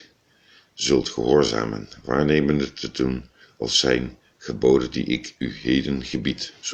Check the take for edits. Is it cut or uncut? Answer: uncut